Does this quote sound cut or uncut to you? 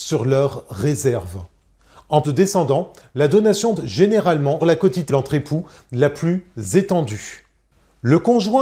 cut